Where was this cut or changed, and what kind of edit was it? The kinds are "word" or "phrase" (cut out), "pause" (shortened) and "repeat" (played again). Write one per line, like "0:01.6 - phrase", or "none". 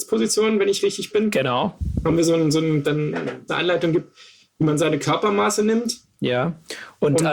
0:02.8 - phrase
0:03.5 - word